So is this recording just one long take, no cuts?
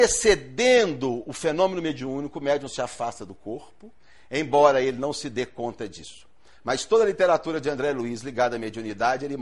yes; 0 cuts

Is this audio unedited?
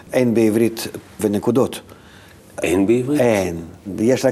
no; 1 cut; at 1.2 s

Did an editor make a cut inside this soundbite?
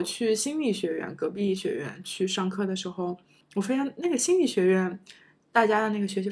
no; 0 cuts

